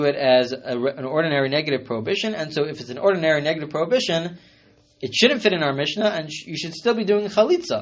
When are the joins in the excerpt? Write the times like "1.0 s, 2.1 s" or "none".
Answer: none